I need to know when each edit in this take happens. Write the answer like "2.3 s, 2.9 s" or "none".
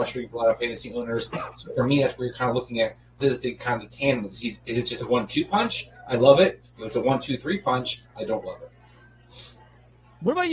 3.2 s